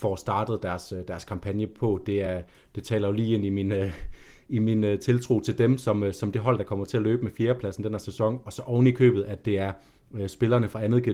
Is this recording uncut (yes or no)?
yes